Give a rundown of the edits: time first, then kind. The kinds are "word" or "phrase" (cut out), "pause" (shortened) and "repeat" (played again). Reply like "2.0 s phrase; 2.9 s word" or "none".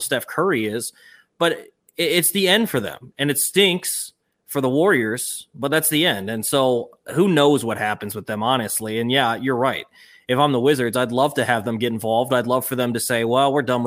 none